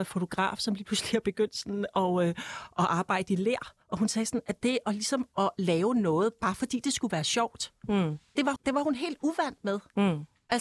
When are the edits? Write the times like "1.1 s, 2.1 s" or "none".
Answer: 3.8 s, 8.6 s

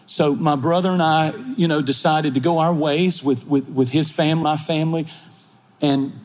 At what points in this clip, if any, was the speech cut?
4.4 s

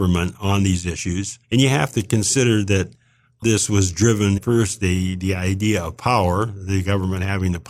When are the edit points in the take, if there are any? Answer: 1.4 s, 3.4 s, 4.4 s

